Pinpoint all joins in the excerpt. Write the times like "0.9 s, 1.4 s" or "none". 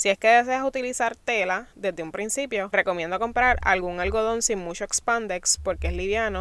2.7 s